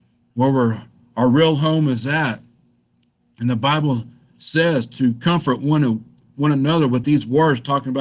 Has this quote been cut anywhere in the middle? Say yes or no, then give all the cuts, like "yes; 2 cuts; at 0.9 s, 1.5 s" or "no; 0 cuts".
no; 0 cuts